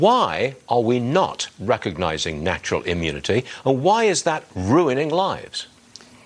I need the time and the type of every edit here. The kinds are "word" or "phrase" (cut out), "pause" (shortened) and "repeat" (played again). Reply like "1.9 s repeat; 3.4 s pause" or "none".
none